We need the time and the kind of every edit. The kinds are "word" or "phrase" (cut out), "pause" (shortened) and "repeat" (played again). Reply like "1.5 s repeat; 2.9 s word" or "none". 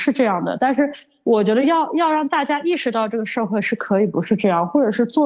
none